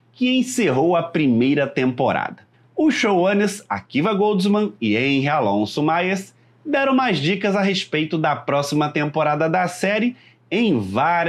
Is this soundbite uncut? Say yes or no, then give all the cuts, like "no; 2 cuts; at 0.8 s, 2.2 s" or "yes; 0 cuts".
yes; 0 cuts